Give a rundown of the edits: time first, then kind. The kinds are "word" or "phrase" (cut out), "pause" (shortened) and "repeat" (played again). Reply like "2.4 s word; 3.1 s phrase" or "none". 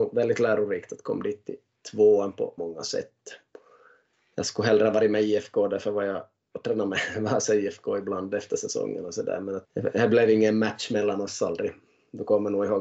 2.6 s word; 9.6 s word